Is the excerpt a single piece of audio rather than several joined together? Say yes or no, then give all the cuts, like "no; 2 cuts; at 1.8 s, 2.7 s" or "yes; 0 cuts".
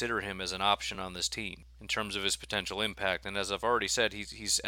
yes; 0 cuts